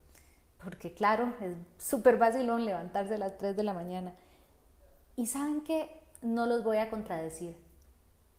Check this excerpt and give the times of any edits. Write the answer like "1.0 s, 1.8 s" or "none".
none